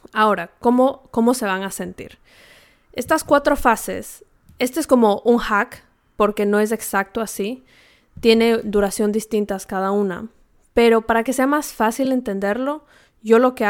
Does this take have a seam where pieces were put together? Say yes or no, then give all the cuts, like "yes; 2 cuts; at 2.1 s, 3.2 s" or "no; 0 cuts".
no; 0 cuts